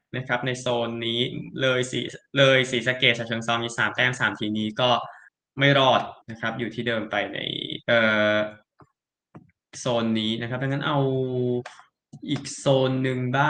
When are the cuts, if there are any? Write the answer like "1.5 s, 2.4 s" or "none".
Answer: 5.3 s, 6.2 s, 7.8 s

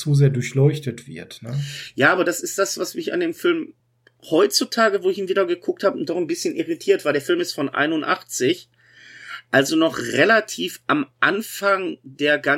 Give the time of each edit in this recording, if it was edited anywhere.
none

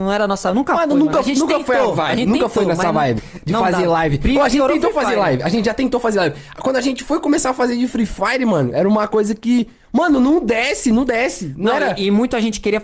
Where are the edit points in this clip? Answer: none

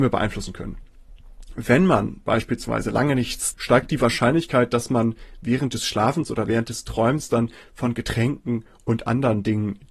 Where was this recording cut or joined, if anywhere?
3.5 s

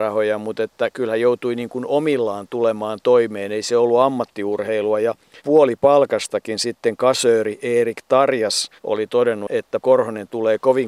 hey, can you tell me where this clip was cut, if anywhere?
5.4 s, 8.8 s, 9.8 s

